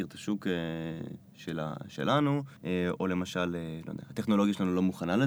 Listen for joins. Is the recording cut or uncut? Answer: cut